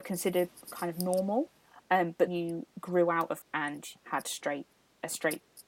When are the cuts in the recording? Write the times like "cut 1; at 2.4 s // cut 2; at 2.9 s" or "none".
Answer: cut 1; at 2.3 s // cut 2; at 3.4 s // cut 3; at 4.0 s